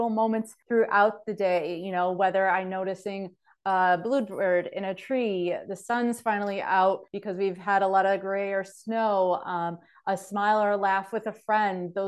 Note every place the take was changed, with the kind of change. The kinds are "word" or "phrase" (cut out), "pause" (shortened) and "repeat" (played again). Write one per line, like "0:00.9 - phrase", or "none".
none